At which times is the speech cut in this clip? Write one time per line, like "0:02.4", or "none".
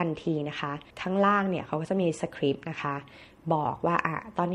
0:00.9